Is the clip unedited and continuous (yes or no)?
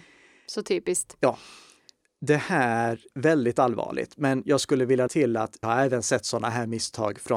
no